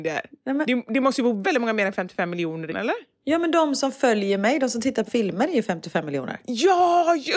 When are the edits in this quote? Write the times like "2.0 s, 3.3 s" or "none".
1.4 s, 2.7 s, 5.1 s